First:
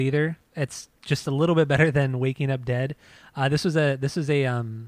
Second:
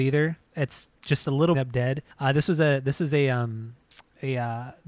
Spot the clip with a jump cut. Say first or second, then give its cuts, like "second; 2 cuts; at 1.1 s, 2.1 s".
second; 2 cuts; at 1.5 s, 2.1 s